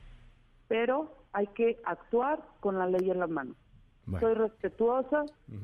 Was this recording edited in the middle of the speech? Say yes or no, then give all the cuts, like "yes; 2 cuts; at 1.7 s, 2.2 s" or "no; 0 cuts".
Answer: no; 0 cuts